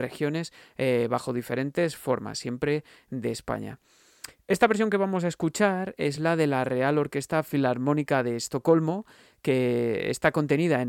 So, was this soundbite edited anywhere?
no; 0 cuts

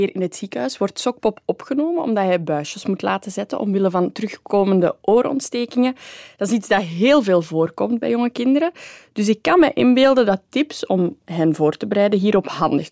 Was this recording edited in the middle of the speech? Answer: no; 0 cuts

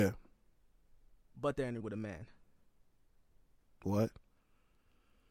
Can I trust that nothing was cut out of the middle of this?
no; 1 cut; at 1.8 s

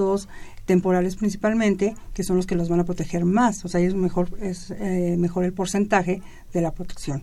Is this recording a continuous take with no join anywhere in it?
yes; 0 cuts

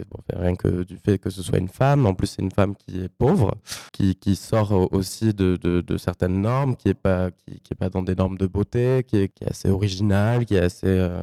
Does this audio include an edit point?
yes; 2 cuts; at 3.9 s, 7.6 s

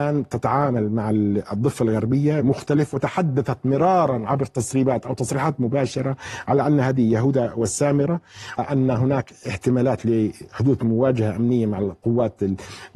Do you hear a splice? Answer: yes; 2 cuts; at 2.4 s, 8.6 s

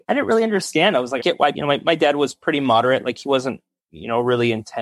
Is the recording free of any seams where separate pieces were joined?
no; 2 cuts; at 1.2 s, 1.5 s

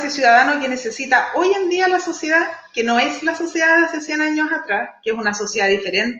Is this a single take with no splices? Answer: yes; 0 cuts

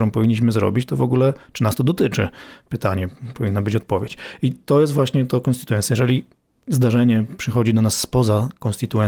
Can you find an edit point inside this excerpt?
no; 0 cuts

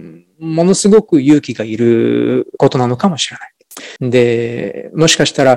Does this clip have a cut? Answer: yes; 1 cut; at 4.0 s

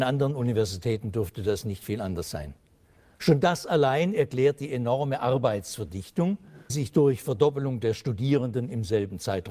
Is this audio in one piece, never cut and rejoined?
no; 1 cut; at 6.7 s

